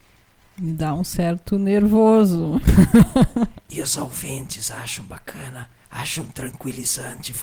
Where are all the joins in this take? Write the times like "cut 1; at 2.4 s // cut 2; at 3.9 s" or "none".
none